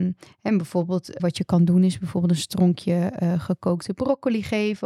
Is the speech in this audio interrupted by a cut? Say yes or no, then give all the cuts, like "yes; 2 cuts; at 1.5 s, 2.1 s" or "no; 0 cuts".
yes; 1 cut; at 1.2 s